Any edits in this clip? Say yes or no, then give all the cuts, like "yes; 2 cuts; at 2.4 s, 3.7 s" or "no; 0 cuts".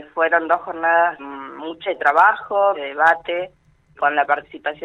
yes; 4 cuts; at 1.2 s, 1.9 s, 2.7 s, 4.0 s